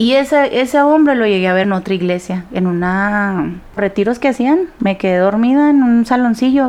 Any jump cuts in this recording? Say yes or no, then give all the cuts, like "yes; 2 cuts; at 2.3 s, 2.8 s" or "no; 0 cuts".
yes; 2 cuts; at 1.6 s, 3.8 s